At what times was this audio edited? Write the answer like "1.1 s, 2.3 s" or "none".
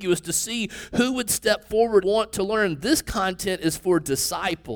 2.0 s

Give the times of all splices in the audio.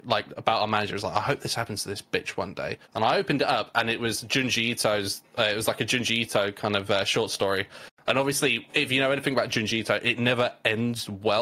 2.8 s

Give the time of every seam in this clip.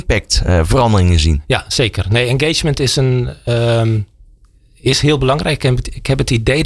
none

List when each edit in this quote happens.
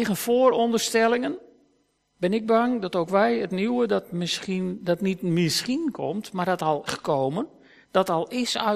6.9 s

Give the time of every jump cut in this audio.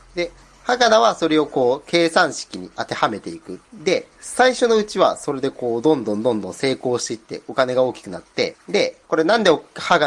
3.6 s, 9.0 s

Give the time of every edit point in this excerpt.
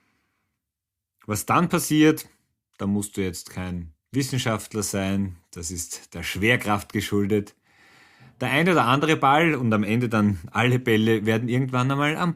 4.0 s

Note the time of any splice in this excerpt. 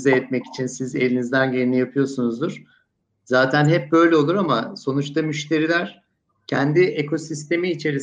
none

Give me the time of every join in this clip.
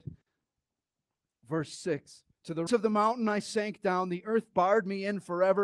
2.3 s, 2.7 s, 4.5 s

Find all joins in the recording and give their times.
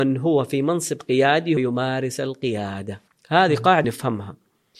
1.6 s, 3.1 s, 3.8 s

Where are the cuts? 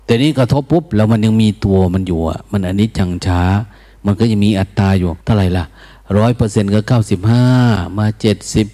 5.2 s

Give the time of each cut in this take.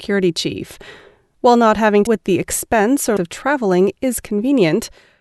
2.1 s, 3.2 s

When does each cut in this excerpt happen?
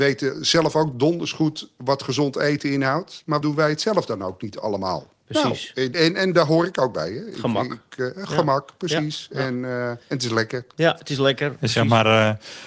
3.4 s, 5.9 s, 10.0 s

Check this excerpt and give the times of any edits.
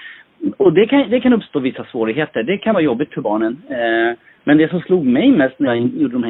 none

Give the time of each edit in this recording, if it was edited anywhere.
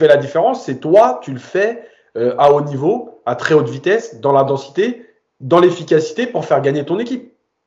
none

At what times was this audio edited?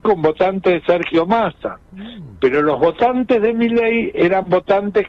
1.8 s

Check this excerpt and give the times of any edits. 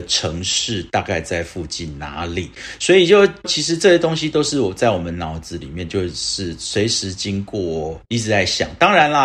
3.4 s, 8.0 s

